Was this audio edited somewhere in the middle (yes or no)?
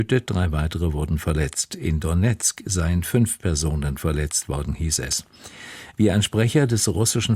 no